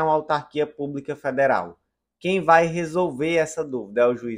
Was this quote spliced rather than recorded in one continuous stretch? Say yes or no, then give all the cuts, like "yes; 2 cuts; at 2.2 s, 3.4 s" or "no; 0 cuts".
no; 0 cuts